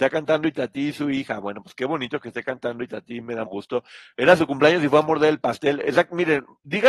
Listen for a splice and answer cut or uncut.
cut